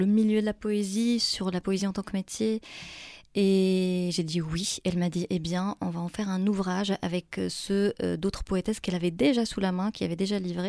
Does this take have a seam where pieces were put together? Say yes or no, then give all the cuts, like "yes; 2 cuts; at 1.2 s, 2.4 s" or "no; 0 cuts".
no; 0 cuts